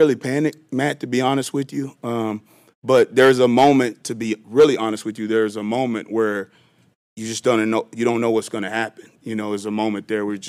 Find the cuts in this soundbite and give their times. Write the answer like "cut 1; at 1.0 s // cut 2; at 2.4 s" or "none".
none